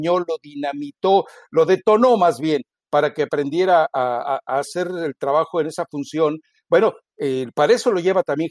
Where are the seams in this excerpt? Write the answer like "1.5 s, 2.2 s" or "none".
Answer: none